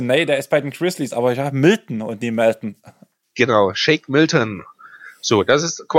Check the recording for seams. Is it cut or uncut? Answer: uncut